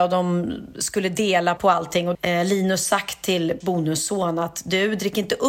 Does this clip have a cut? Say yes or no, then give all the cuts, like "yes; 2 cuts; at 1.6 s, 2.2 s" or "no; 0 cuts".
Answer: yes; 3 cuts; at 1.6 s, 2.1 s, 3.6 s